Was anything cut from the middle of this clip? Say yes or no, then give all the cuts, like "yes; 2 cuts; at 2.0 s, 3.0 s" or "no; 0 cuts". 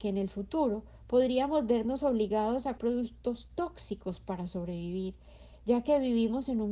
yes; 1 cut; at 2.8 s